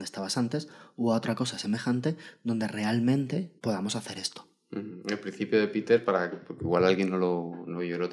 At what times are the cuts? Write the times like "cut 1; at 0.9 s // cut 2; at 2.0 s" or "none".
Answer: cut 1; at 3.6 s

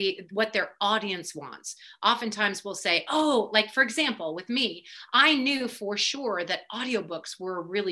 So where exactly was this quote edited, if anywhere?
none

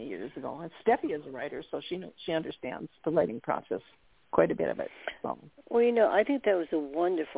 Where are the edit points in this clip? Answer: cut 1; at 4.2 s

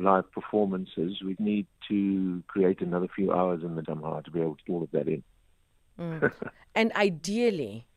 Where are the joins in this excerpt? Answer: cut 1; at 1.4 s // cut 2; at 3.8 s // cut 3; at 4.6 s

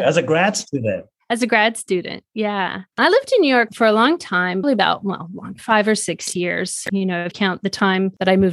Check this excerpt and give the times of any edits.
cut 1; at 3.7 s // cut 2; at 4.6 s // cut 3; at 5.6 s // cut 4; at 7.3 s

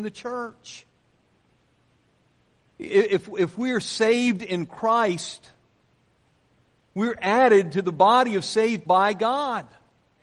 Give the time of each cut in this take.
cut 1; at 8.9 s

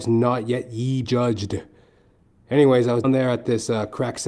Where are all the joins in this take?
cut 1; at 1.0 s // cut 2; at 3.0 s

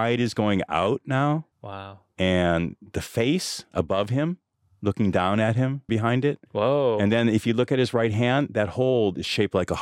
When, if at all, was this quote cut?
cut 1; at 1.5 s // cut 2; at 4.5 s // cut 3; at 5.9 s // cut 4; at 6.5 s

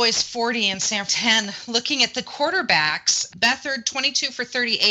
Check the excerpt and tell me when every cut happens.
cut 1; at 1.1 s // cut 2; at 2.2 s // cut 3; at 3.3 s

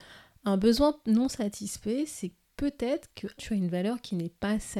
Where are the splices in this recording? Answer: cut 1; at 3.4 s

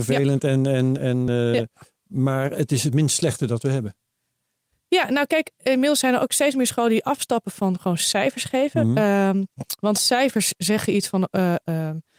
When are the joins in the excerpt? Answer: none

